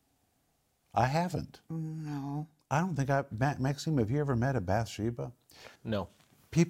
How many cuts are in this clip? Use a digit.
1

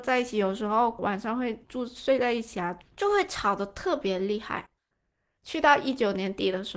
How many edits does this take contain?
0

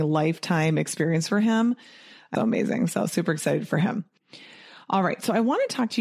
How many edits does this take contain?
1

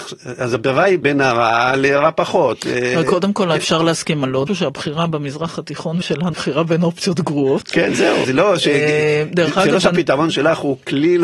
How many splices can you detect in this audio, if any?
5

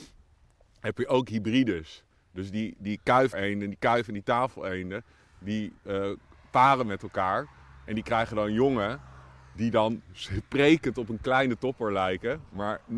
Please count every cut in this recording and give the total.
1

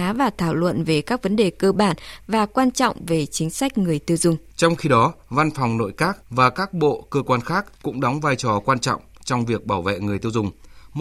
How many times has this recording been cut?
3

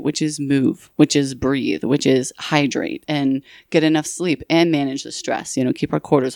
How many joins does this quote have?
0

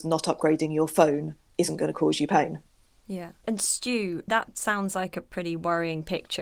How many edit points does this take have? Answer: 0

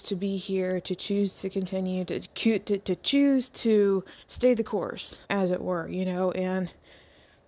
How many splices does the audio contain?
2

